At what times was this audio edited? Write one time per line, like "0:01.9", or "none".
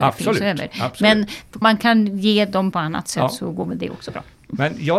0:01.6
0:02.7